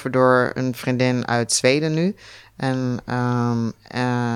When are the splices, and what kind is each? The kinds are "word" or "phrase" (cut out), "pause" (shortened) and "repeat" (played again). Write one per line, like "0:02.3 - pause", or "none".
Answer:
none